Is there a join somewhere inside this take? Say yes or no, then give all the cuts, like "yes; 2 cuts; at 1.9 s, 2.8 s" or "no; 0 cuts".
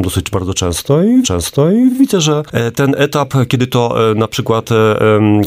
yes; 1 cut; at 1.2 s